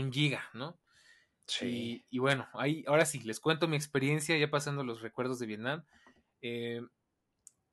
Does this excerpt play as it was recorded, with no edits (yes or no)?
yes